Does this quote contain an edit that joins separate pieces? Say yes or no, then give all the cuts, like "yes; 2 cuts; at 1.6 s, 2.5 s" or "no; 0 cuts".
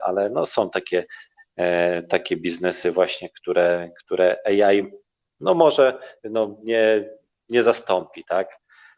no; 0 cuts